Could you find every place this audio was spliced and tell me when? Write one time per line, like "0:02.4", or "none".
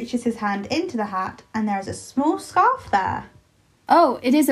none